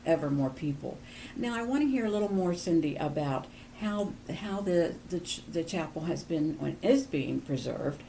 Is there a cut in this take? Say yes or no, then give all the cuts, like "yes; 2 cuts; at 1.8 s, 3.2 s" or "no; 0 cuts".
no; 0 cuts